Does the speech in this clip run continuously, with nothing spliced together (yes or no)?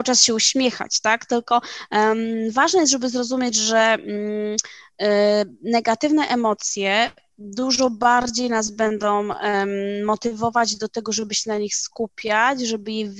yes